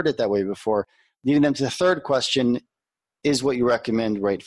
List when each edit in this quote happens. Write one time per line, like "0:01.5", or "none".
none